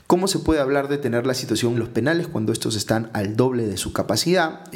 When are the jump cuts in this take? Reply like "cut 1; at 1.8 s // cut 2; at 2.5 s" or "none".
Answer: cut 1; at 1.7 s